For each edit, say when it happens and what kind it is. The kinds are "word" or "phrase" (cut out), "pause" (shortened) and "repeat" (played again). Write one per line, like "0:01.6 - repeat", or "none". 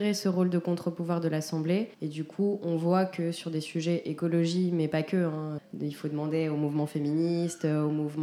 0:01.9 - pause
0:05.6 - word